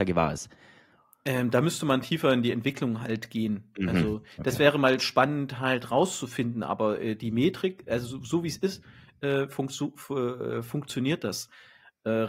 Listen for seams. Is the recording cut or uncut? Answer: uncut